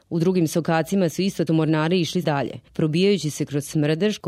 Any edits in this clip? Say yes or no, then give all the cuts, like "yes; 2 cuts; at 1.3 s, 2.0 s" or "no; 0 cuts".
yes; 3 cuts; at 1.1 s, 1.5 s, 2.2 s